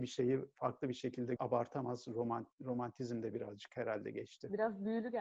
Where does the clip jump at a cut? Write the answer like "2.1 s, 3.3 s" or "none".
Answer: 1.4 s